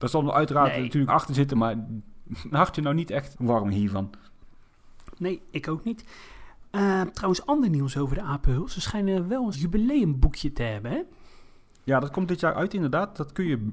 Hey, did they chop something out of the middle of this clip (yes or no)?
yes